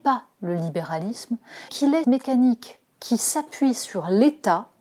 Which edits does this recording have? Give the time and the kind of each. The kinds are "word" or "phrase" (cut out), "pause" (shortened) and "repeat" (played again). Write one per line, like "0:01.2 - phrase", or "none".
0:01.7 - word
0:02.0 - word